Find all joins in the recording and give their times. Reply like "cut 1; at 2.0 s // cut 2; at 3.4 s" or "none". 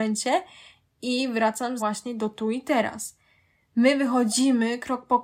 cut 1; at 1.8 s